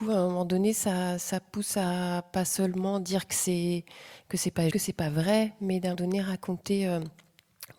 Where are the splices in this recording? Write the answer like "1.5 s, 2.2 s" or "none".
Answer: 4.7 s, 5.9 s